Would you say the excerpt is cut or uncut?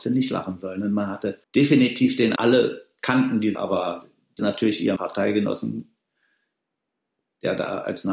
cut